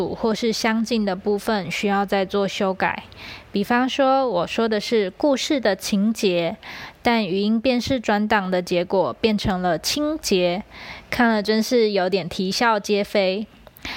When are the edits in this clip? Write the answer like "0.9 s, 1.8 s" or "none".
none